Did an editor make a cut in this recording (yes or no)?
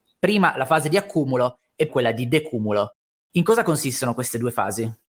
yes